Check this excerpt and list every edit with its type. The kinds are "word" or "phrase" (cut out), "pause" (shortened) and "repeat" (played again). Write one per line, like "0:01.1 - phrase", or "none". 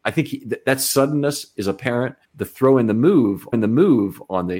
0:02.2 - pause
0:03.5 - repeat